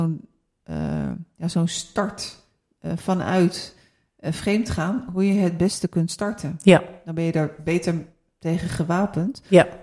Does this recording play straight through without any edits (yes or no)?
yes